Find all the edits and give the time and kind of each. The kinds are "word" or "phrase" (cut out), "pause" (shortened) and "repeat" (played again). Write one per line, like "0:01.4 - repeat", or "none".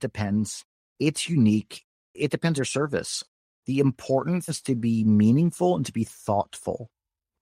0:02.6 - word
0:04.5 - word